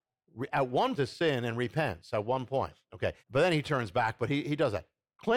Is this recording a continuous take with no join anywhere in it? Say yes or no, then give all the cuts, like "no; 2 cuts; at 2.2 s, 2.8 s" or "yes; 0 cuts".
no; 2 cuts; at 0.9 s, 3.2 s